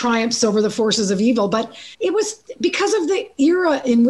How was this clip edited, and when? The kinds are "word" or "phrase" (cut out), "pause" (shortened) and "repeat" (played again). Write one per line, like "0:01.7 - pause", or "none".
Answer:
0:01.9 - pause